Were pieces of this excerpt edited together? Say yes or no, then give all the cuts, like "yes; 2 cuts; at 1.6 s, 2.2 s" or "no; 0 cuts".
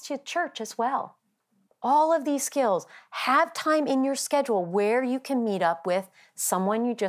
yes; 1 cut; at 1.6 s